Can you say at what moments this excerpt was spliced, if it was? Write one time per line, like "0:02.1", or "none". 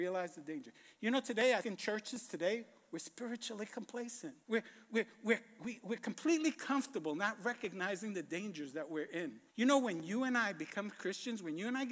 0:01.6
0:04.4
0:09.5